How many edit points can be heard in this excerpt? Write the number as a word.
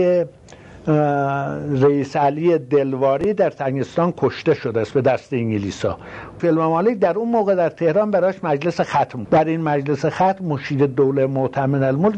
two